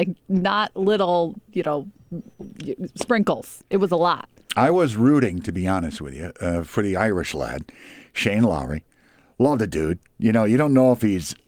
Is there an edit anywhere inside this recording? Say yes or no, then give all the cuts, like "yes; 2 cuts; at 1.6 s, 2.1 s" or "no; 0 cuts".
no; 0 cuts